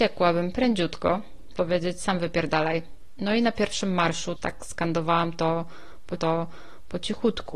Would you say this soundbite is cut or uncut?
cut